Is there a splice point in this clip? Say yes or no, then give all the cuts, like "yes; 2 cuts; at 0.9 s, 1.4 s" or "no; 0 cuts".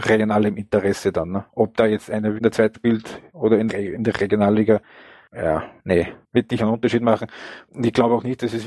yes; 4 cuts; at 2.4 s, 2.7 s, 3.7 s, 6.6 s